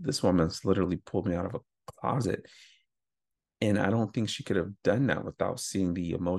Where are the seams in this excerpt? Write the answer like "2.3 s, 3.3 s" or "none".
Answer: none